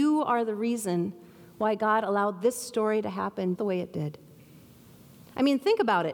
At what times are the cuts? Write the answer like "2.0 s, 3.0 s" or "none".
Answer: 3.6 s